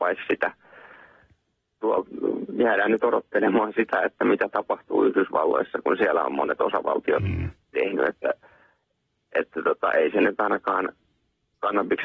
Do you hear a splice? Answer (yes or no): no